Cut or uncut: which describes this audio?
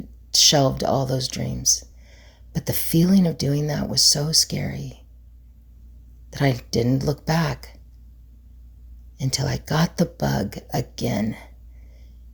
uncut